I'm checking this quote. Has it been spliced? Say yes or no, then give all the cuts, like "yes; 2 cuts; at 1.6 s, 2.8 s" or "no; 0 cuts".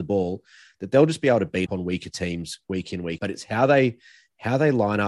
yes; 2 cuts; at 1.7 s, 3.2 s